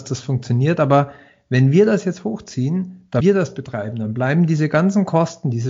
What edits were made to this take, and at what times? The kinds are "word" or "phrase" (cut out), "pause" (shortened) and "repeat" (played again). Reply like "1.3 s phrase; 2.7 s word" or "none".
3.2 s word